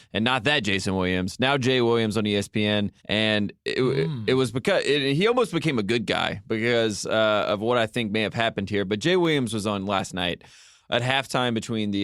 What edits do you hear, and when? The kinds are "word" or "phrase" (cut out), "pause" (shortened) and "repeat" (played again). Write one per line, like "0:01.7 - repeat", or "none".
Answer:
0:03.0 - pause